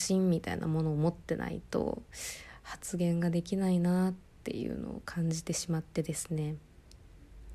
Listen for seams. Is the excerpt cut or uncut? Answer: uncut